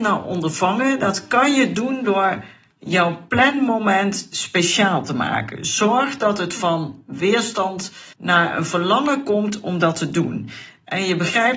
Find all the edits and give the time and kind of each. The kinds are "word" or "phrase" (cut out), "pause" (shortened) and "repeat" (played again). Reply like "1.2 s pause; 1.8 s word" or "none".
8.1 s pause